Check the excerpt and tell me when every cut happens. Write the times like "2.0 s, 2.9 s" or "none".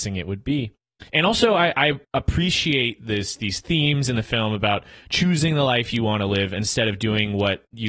1.1 s, 2.0 s